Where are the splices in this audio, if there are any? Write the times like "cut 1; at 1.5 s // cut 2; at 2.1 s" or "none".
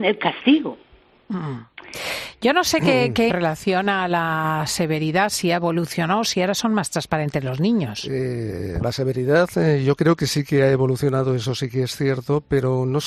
cut 1; at 3.3 s // cut 2; at 8.8 s